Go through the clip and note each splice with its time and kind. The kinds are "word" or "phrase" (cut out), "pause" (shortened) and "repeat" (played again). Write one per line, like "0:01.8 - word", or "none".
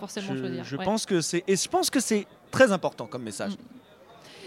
none